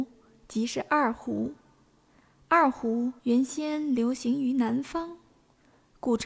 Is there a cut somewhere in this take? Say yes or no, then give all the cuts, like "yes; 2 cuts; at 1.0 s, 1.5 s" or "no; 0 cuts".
yes; 1 cut; at 3.2 s